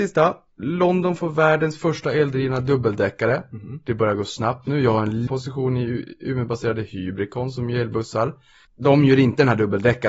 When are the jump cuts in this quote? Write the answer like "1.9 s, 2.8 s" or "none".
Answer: 5.3 s